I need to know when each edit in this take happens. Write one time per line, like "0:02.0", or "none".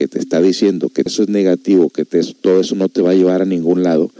0:01.1